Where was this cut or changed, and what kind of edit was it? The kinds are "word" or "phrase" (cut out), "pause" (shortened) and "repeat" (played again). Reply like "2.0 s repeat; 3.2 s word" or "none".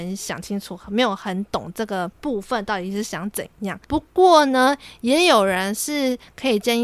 2.1 s pause; 3.8 s pause